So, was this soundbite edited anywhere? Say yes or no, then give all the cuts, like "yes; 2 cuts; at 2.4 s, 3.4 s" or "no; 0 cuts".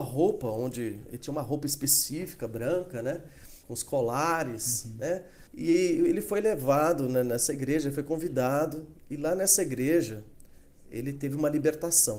yes; 2 cuts; at 3.6 s, 5.5 s